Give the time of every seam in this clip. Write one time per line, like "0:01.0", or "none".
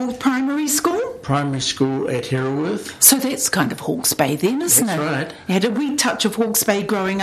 none